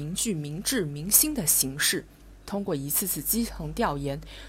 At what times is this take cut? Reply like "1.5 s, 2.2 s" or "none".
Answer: 2.4 s